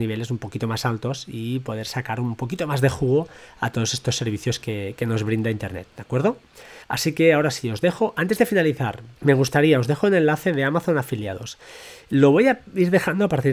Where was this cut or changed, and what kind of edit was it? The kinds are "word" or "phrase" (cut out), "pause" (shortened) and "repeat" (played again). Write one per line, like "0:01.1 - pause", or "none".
0:05.9 - pause
0:06.8 - pause
0:09.2 - pause